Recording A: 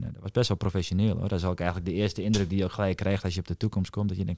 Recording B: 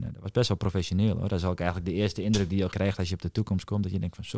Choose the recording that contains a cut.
B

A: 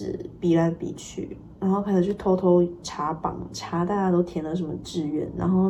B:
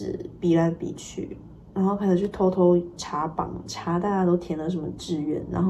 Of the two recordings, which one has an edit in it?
A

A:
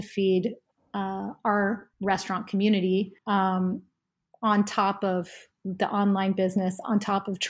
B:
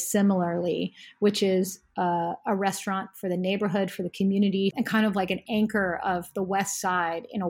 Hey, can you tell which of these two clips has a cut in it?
A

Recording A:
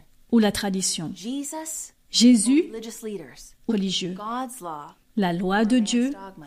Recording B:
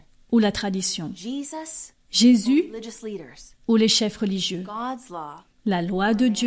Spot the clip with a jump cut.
A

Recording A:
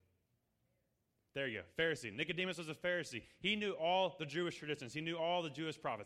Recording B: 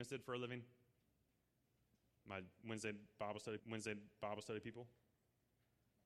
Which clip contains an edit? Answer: B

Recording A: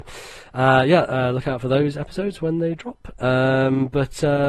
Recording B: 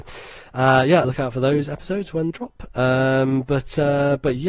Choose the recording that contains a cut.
B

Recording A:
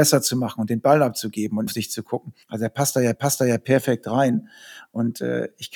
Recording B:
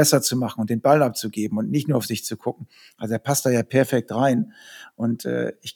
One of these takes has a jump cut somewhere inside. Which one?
A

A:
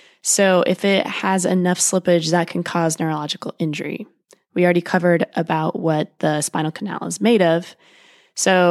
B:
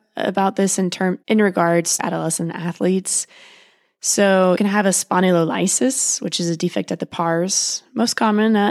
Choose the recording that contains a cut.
B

